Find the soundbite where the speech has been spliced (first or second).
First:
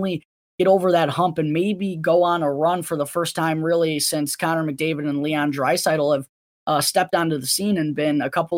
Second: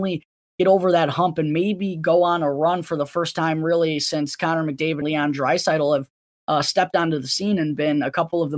second